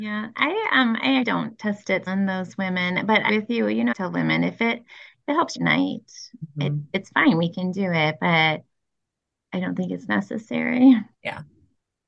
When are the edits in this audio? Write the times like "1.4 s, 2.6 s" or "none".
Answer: 1.2 s, 2.1 s, 3.3 s, 3.9 s, 5.6 s, 11.1 s